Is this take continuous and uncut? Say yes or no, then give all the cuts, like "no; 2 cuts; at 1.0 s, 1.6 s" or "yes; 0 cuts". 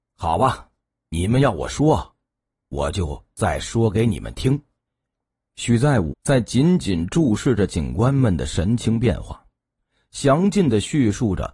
no; 1 cut; at 6.1 s